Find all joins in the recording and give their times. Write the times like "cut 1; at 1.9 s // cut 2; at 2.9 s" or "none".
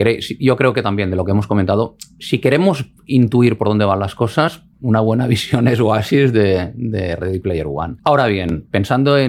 cut 1; at 3.0 s // cut 2; at 4.7 s // cut 3; at 8.0 s